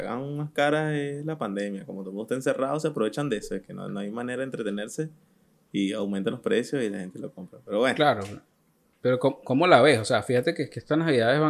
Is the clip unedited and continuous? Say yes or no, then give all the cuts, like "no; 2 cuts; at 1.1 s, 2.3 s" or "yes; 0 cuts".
yes; 0 cuts